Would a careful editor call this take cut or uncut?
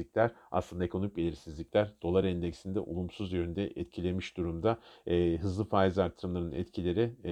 uncut